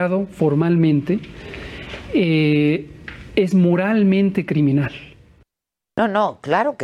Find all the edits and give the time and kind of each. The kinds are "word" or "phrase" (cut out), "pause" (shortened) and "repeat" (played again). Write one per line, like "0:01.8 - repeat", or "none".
none